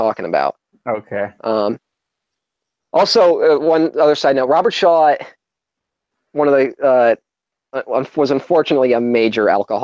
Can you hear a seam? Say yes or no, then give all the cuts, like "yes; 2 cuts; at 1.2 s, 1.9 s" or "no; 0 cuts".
no; 0 cuts